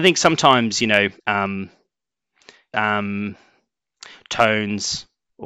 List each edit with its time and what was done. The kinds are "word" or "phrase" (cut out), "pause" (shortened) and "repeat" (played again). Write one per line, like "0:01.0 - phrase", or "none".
0:01.2 - pause
0:02.7 - phrase

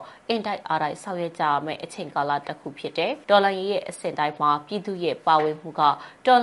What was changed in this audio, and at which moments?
0:03.2 - pause

